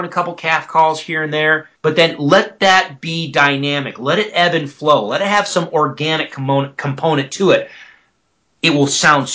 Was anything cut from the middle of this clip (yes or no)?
yes